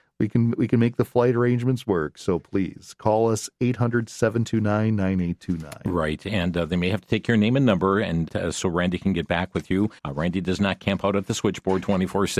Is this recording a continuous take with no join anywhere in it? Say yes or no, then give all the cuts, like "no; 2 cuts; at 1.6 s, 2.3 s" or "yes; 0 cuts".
no; 2 cuts; at 8.3 s, 10.0 s